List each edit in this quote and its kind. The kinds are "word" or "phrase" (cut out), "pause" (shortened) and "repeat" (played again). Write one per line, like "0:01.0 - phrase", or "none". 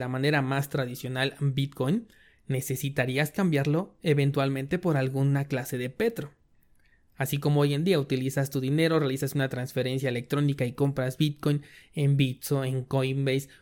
none